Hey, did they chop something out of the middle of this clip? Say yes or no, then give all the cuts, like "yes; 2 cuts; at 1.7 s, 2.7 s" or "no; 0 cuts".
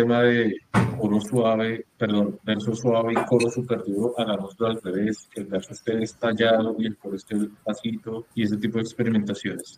yes; 1 cut; at 8.3 s